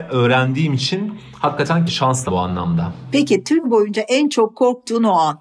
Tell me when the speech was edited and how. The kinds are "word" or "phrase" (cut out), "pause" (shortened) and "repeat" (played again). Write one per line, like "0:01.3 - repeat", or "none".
0:01.9 - word
0:02.3 - word
0:03.6 - word